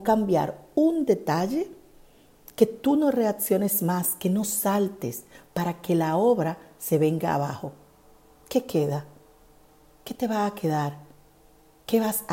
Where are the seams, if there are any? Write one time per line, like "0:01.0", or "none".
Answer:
none

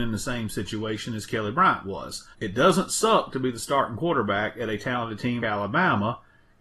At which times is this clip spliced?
0:02.3
0:05.4

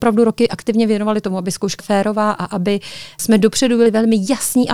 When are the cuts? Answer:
0:01.8

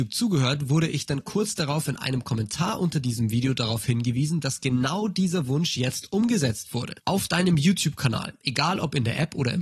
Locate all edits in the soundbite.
0:07.0

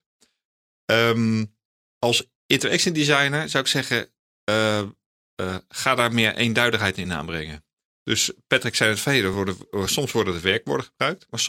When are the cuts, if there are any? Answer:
none

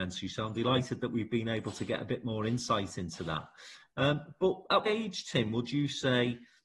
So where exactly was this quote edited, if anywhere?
0:04.9

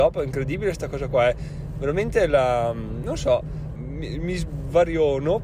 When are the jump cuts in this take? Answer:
0:03.8

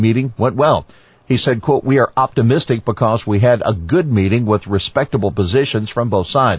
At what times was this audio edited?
none

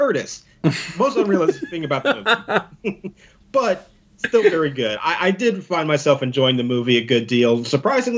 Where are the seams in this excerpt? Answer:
none

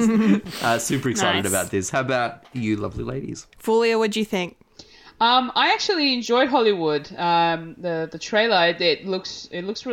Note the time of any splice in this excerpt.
0:03.5

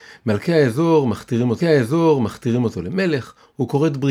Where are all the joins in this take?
0:01.6

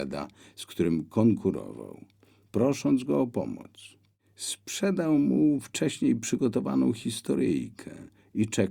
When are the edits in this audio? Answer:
none

